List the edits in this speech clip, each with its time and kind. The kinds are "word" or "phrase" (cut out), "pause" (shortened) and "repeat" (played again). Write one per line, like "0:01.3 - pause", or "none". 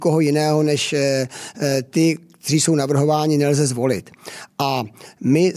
none